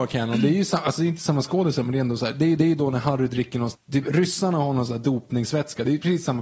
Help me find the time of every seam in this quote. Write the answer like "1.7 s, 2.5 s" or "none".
2.6 s, 3.7 s